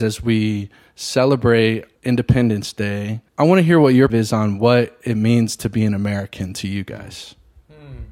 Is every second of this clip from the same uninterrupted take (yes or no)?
no